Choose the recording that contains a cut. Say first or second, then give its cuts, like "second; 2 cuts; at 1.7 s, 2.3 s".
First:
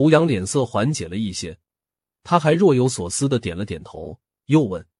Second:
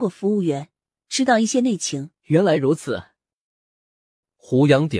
second; 1 cut; at 2.2 s